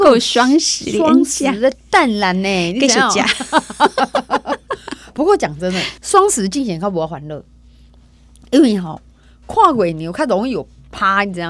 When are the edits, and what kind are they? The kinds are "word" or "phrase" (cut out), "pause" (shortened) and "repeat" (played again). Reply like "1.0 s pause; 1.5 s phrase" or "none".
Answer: 6.0 s pause